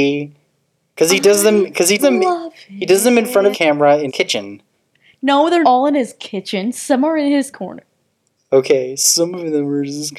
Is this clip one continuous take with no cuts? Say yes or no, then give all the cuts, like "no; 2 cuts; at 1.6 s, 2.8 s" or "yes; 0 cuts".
no; 5 cuts; at 2.0 s, 3.5 s, 4.1 s, 5.6 s, 7.5 s